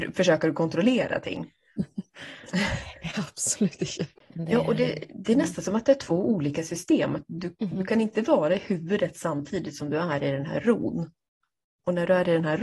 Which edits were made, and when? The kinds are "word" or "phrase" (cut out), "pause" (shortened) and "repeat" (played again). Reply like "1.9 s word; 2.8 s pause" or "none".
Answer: none